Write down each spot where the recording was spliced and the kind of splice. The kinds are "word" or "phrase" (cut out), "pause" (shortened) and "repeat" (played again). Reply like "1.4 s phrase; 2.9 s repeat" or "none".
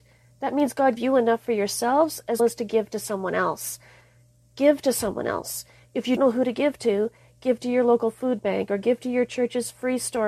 1.0 s word; 2.4 s word; 6.2 s word

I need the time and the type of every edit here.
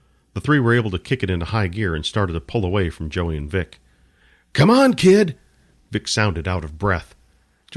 none

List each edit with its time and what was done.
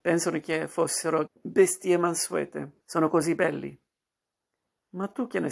1.3 s word; 2.8 s pause

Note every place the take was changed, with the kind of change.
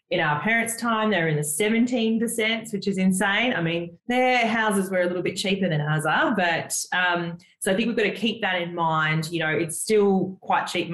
4.0 s pause

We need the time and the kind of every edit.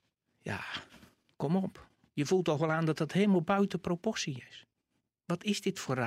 none

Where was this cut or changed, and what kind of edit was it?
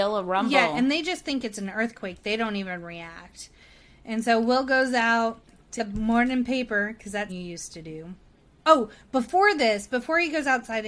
5.8 s word; 7.3 s word

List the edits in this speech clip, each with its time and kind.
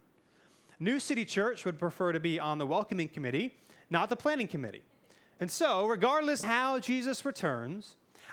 6.4 s phrase

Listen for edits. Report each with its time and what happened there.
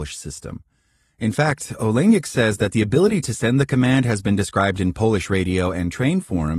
none

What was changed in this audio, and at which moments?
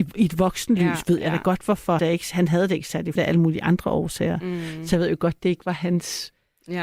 2.0 s phrase; 3.2 s word

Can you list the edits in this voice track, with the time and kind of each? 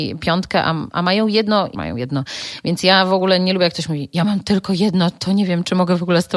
1.7 s phrase

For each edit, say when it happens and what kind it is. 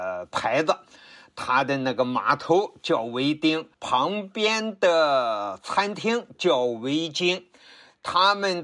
3.7 s pause

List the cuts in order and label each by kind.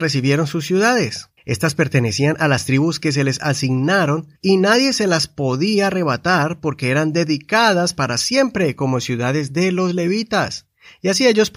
1.4 s pause; 4.3 s pause

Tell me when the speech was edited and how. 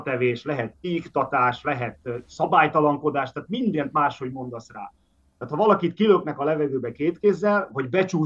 none

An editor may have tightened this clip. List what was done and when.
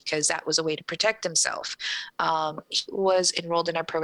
2.9 s word

